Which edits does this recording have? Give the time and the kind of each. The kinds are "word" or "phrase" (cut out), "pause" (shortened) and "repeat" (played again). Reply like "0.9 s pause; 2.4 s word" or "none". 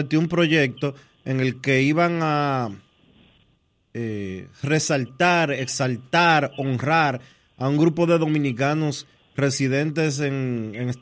none